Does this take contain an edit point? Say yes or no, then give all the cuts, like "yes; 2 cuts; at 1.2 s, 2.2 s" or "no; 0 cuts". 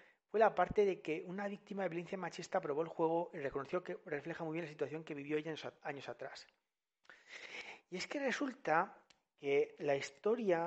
no; 0 cuts